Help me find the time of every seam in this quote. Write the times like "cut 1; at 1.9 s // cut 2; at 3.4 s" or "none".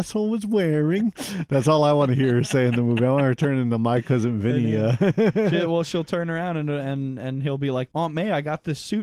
none